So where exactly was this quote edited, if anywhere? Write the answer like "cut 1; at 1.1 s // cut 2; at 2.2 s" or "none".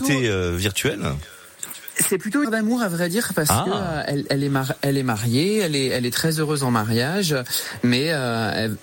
cut 1; at 2.4 s